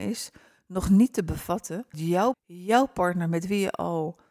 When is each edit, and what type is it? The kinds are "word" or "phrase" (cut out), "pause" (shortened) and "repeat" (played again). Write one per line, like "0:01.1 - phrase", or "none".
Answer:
0:01.9 - word
0:02.3 - word